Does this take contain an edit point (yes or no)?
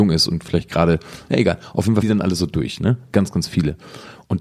yes